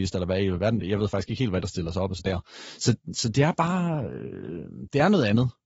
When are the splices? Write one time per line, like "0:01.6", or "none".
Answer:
0:01.6
0:02.2